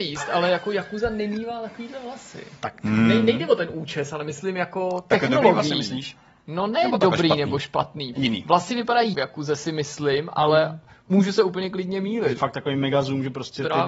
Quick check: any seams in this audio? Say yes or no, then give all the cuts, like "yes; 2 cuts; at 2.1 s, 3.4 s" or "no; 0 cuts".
yes; 3 cuts; at 8.1 s, 9.1 s, 12.4 s